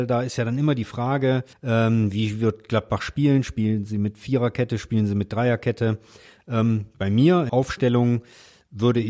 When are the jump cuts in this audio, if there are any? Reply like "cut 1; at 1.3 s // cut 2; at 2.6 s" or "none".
cut 1; at 1.5 s // cut 2; at 7.5 s